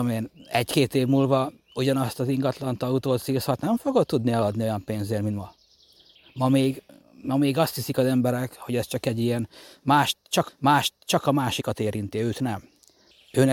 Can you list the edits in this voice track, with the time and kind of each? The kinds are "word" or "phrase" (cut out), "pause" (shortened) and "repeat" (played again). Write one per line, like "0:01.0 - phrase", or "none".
0:10.5 - repeat